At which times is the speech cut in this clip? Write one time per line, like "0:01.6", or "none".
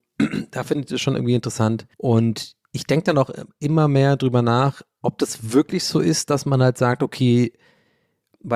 0:01.9